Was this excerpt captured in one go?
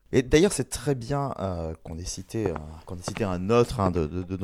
no; 1 cut; at 2.8 s

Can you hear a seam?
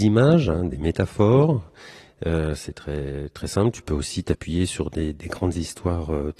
no; 0 cuts

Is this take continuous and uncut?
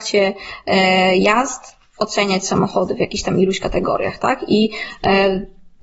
yes; 0 cuts

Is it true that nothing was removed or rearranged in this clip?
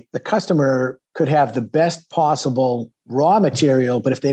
yes; 0 cuts

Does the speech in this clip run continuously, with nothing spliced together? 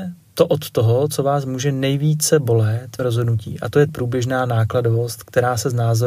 no; 2 cuts; at 3.0 s, 3.9 s

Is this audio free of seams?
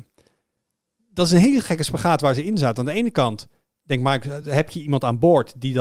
yes; 0 cuts

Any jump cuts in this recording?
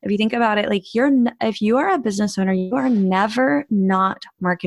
no; 0 cuts

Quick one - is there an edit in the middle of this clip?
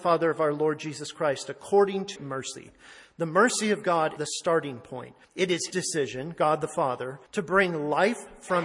yes; 5 cuts; at 2.1 s, 4.2 s, 5.2 s, 5.7 s, 7.3 s

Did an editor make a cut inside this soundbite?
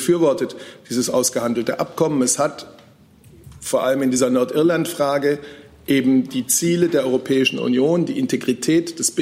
no; 0 cuts

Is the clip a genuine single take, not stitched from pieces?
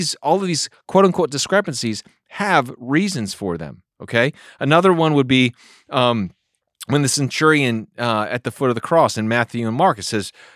yes; 0 cuts

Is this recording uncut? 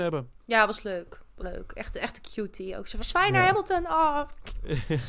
no; 2 cuts; at 1.4 s, 3.0 s

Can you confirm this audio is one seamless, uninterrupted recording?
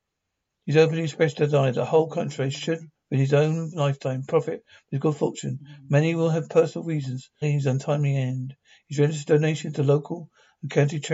no; 1 cut; at 7.4 s

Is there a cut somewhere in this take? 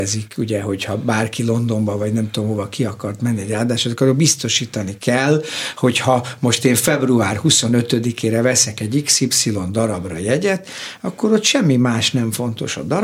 no; 0 cuts

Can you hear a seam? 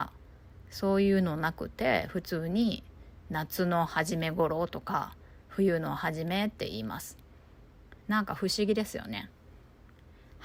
yes; 2 cuts; at 5.4 s, 8.0 s

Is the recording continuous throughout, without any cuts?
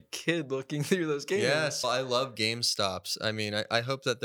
no; 1 cut; at 1.8 s

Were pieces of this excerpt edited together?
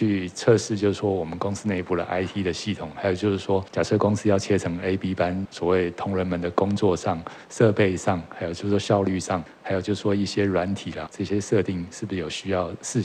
yes; 1 cut; at 11.1 s

